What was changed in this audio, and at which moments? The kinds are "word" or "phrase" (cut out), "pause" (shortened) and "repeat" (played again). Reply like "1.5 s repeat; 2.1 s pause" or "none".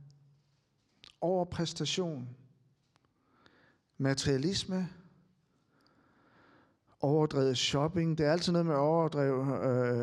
none